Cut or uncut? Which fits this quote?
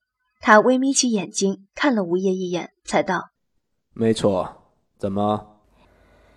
cut